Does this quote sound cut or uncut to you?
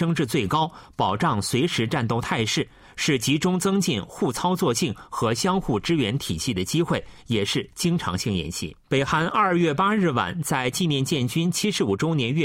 cut